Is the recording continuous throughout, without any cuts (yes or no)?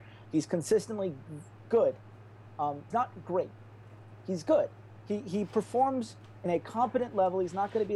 no